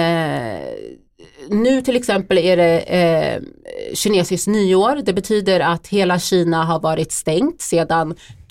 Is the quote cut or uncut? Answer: uncut